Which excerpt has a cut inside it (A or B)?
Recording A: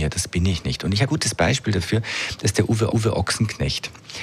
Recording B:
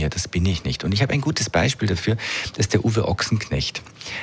A